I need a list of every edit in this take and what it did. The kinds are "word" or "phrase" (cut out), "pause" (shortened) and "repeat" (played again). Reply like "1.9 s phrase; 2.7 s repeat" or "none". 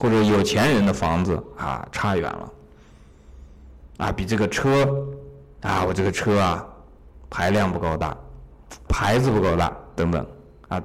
3.9 s pause; 8.9 s word

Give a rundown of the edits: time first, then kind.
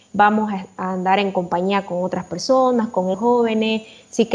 3.1 s phrase

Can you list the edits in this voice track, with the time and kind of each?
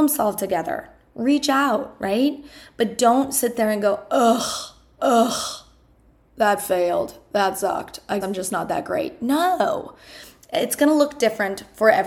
5.0 s repeat; 8.2 s word

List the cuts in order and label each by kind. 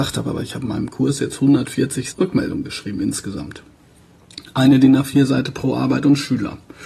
2.1 s word

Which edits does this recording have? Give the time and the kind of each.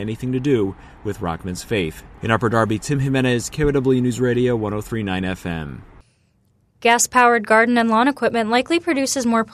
none

